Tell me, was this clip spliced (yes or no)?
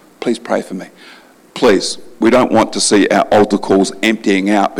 no